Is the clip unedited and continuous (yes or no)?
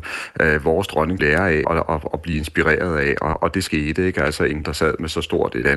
no